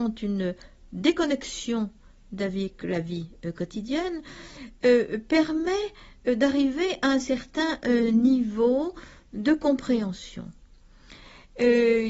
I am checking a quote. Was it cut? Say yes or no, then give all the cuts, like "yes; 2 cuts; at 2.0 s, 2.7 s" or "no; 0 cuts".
no; 0 cuts